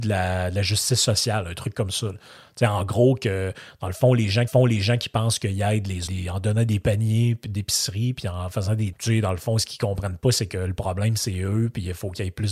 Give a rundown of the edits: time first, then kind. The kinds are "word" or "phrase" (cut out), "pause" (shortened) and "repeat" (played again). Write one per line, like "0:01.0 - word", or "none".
0:04.5 - repeat
0:06.1 - phrase
0:08.9 - word